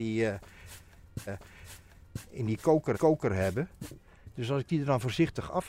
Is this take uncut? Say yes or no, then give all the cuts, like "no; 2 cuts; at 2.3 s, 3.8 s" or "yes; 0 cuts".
no; 2 cuts; at 1.3 s, 2.9 s